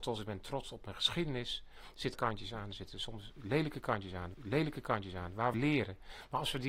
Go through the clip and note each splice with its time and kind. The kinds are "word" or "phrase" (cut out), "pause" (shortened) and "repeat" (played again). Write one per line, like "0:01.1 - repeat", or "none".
0:02.1 - word
0:04.3 - repeat
0:05.5 - phrase